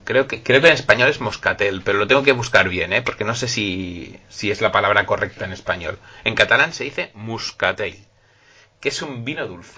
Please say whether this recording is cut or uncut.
uncut